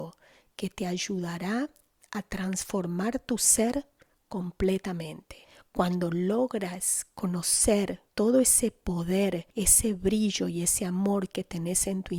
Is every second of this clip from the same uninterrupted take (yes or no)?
no